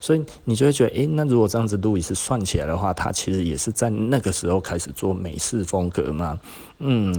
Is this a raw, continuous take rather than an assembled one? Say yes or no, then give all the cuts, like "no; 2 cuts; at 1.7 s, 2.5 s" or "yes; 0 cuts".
yes; 0 cuts